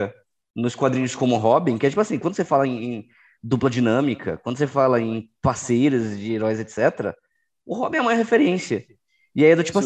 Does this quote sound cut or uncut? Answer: uncut